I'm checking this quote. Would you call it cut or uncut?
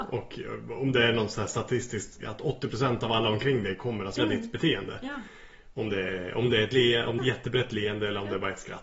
cut